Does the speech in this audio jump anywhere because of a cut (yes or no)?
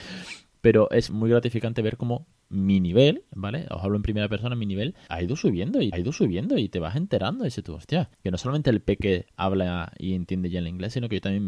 yes